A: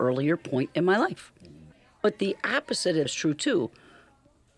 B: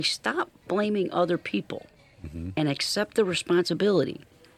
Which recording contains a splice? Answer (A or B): A